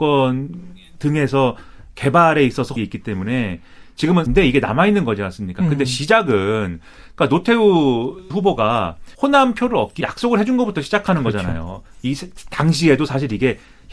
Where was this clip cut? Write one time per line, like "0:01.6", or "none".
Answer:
0:02.8
0:04.3
0:08.3
0:09.1
0:10.0